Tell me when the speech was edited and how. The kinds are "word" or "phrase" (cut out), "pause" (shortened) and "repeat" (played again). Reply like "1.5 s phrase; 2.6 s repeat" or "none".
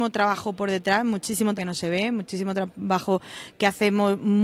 1.6 s word